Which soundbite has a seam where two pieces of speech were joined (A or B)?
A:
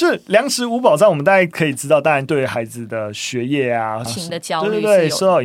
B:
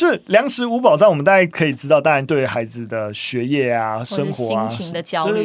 A